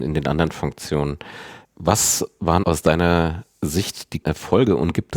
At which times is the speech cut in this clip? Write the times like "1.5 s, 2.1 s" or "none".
1.6 s, 2.6 s, 4.2 s